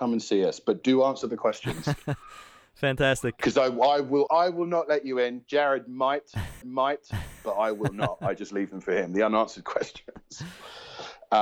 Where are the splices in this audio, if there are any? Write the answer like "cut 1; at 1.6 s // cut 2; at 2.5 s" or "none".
cut 1; at 4.3 s // cut 2; at 6.6 s